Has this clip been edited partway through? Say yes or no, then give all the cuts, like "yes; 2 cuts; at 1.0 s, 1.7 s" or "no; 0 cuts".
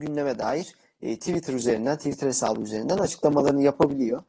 no; 0 cuts